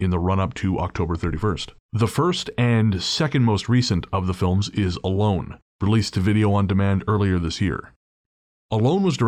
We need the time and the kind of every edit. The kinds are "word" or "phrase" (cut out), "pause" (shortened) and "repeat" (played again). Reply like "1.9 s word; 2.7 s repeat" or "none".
1.8 s pause